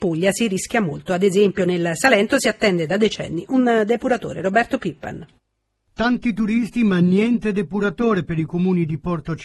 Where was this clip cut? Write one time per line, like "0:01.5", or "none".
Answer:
none